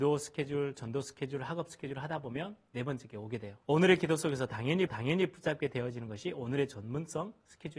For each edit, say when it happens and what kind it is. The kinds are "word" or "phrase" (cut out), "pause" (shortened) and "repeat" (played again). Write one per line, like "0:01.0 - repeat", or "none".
0:03.6 - pause
0:04.9 - repeat